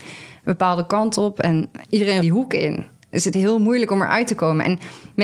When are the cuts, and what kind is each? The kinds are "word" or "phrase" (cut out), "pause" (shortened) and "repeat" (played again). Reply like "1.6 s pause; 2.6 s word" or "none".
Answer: 1.8 s word; 2.2 s phrase; 3.3 s word